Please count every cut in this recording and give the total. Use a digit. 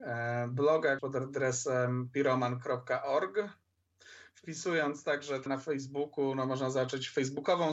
2